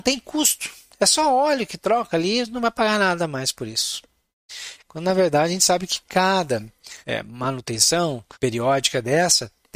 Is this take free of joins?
no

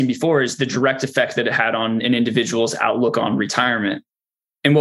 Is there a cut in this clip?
no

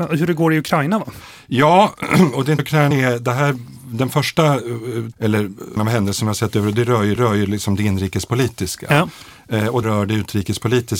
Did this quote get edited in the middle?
yes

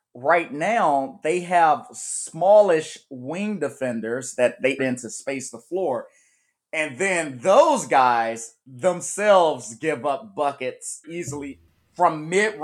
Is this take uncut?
no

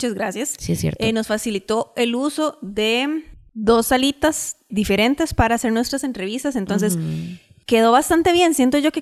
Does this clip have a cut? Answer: no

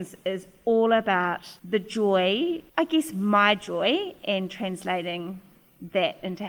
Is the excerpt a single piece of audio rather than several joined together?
no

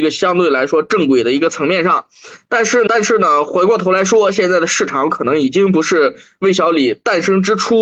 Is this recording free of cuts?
no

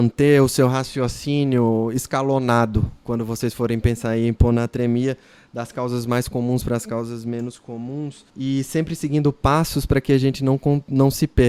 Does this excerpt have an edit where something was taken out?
yes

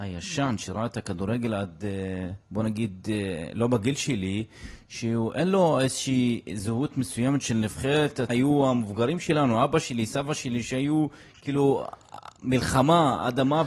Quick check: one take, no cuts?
no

